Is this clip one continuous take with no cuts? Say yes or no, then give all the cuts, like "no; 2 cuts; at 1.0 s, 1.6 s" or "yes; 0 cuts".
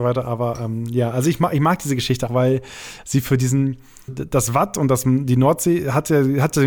no; 2 cuts; at 2.3 s, 4.1 s